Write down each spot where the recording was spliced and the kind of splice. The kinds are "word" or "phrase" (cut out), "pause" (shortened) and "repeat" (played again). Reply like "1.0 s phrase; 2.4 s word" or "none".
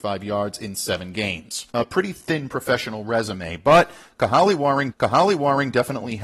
1.7 s pause; 4.9 s repeat